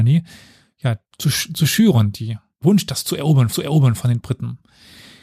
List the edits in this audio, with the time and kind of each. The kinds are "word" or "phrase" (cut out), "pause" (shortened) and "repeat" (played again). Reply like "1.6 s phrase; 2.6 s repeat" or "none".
1.0 s pause; 2.6 s word; 3.5 s repeat